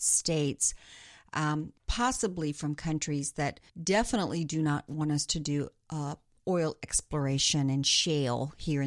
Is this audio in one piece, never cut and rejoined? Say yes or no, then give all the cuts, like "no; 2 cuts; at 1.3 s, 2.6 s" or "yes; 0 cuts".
no; 2 cuts; at 1.8 s, 3.7 s